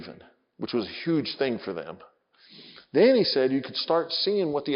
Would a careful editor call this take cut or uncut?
uncut